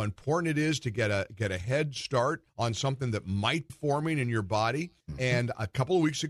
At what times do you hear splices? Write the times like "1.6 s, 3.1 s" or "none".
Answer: 2.5 s, 3.7 s, 5.0 s